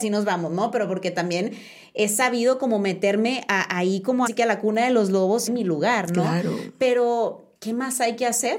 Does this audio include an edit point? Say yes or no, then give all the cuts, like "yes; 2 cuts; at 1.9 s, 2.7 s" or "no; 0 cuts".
yes; 3 cuts; at 4.3 s, 5.5 s, 7.5 s